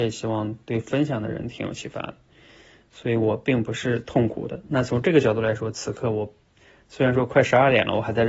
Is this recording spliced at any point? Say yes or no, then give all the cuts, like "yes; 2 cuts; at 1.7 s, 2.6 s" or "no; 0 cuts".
no; 0 cuts